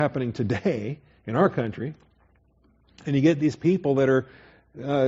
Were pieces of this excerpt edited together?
no; 0 cuts

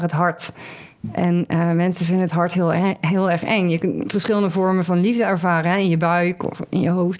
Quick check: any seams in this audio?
no; 0 cuts

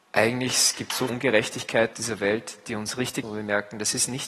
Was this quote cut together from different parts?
yes; 3 cuts; at 1.1 s, 1.9 s, 3.2 s

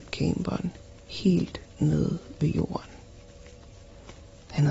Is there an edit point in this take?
no; 0 cuts

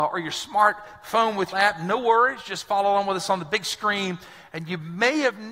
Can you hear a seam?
yes; 1 cut; at 1.5 s

